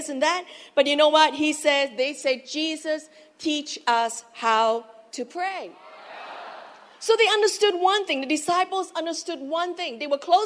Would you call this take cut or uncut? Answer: uncut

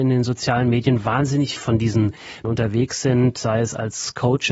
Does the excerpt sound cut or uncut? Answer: cut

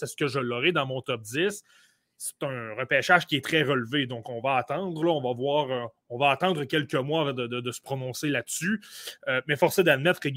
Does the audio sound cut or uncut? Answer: uncut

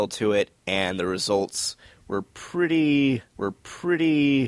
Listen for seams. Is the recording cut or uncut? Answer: cut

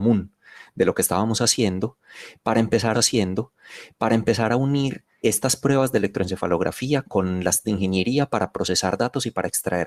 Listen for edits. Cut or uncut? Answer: cut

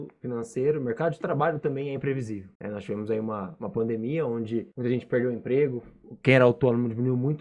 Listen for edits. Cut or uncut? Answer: cut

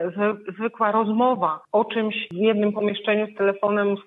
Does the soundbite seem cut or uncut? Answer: cut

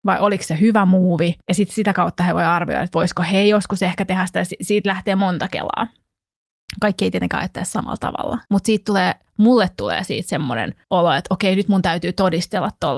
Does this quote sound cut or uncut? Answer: cut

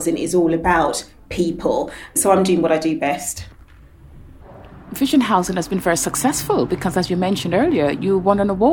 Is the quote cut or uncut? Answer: uncut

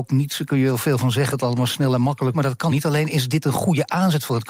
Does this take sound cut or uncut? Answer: cut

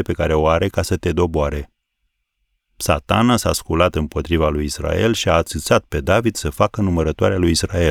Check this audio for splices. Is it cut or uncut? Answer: uncut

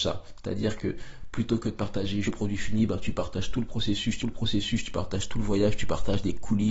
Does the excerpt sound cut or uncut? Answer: cut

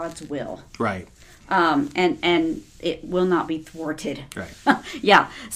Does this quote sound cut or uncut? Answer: uncut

